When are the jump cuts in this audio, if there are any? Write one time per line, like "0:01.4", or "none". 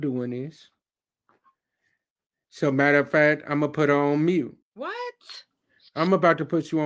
0:04.6